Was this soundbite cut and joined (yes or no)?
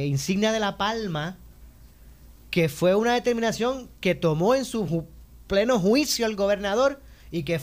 no